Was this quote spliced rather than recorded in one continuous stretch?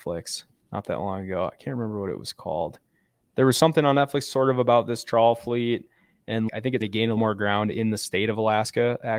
yes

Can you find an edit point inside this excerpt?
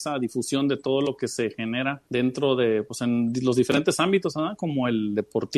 yes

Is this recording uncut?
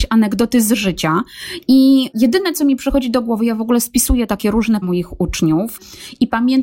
no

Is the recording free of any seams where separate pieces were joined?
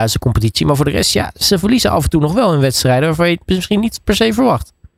yes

